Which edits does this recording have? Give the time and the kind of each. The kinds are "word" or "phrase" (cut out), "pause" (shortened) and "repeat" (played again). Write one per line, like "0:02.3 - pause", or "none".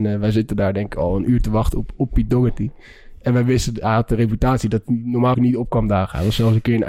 0:05.3 - word